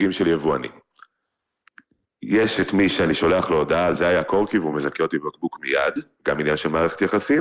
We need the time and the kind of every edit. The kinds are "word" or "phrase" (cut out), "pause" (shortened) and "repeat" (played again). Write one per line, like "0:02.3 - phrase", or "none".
none